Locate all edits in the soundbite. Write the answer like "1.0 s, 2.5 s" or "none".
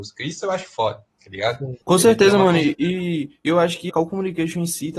1.8 s, 3.9 s